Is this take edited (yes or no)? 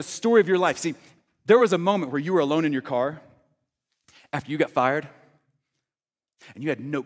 no